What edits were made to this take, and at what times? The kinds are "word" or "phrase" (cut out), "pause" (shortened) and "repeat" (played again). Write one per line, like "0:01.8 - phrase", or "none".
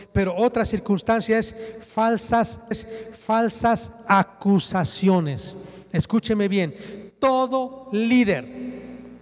0:02.7 - repeat